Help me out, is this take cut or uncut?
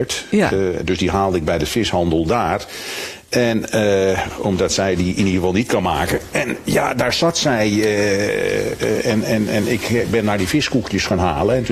uncut